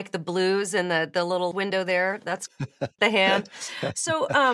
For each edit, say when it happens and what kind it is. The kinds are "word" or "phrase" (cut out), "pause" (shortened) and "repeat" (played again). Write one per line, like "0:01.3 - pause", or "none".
0:01.5 - phrase
0:02.5 - word
0:03.0 - word